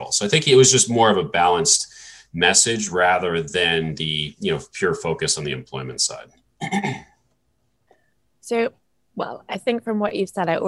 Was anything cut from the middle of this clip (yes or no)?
no